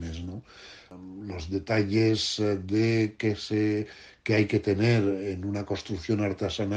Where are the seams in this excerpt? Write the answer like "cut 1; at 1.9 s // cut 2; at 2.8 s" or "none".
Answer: none